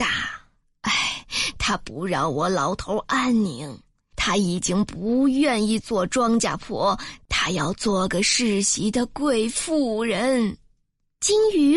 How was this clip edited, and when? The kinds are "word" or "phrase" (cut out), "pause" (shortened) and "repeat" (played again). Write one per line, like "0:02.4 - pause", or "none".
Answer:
none